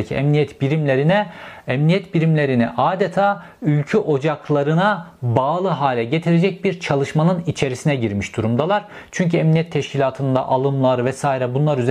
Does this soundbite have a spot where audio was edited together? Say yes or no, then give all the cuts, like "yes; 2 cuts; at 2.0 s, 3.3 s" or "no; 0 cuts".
no; 0 cuts